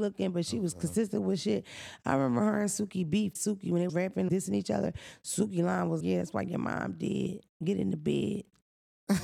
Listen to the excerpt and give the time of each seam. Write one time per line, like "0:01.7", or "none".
0:03.4
0:03.9
0:04.3
0:06.0